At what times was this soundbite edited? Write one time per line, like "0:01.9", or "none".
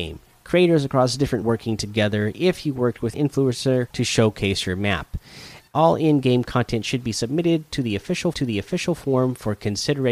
0:01.4
0:03.1
0:03.9
0:05.7
0:08.3